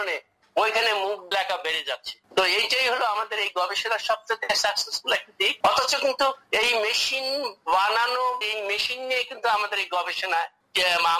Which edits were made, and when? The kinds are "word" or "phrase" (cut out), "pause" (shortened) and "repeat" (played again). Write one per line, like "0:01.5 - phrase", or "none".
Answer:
0:01.3 - phrase
0:02.2 - pause
0:05.6 - pause
0:08.4 - word